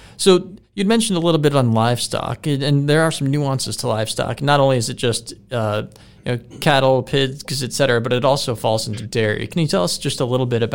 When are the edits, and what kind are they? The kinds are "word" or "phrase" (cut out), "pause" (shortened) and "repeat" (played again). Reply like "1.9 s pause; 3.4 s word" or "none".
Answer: none